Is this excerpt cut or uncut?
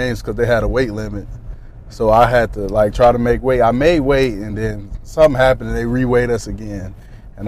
uncut